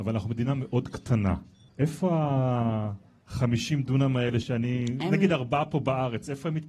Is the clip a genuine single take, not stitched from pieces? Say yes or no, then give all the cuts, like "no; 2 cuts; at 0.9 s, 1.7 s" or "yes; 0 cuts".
yes; 0 cuts